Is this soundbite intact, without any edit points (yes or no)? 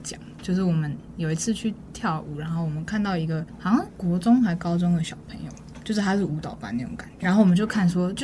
no